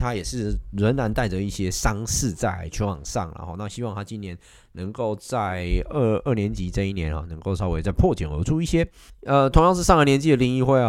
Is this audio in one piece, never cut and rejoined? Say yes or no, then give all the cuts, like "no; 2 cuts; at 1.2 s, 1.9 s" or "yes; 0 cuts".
yes; 0 cuts